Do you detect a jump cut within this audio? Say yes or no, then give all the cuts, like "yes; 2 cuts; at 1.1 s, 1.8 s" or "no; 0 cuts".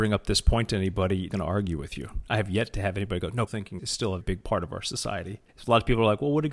yes; 5 cuts; at 1.3 s, 3.5 s, 3.8 s, 4.2 s, 5.5 s